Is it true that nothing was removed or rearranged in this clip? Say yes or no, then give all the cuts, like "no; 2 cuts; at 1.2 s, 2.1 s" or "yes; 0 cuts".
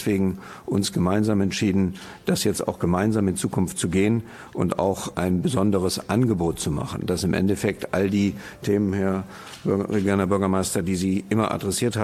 no; 1 cut; at 5.1 s